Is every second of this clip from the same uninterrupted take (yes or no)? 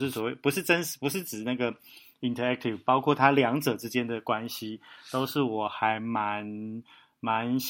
yes